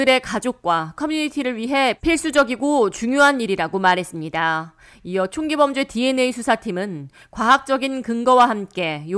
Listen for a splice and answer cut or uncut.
uncut